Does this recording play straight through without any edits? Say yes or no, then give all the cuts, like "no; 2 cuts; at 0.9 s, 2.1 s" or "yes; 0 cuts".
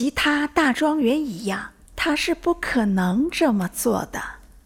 no; 1 cut; at 1.8 s